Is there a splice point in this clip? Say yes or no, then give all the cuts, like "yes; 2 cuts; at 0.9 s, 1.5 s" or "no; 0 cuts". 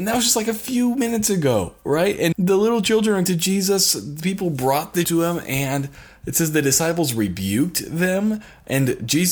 yes; 3 cuts; at 2.3 s, 3.3 s, 5.0 s